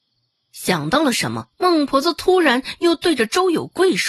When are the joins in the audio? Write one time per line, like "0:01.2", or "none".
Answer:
0:01.5